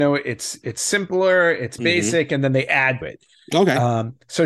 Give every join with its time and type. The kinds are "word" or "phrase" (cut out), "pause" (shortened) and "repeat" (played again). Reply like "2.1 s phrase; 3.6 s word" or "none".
1.8 s word; 3.0 s word